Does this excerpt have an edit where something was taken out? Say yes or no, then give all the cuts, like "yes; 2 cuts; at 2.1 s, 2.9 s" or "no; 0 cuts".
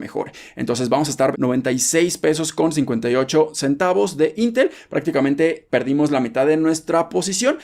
yes; 1 cut; at 1.3 s